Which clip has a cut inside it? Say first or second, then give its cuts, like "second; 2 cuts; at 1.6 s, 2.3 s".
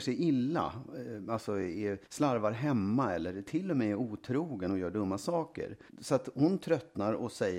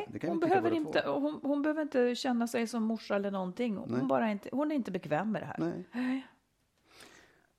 first; 2 cuts; at 2.0 s, 5.9 s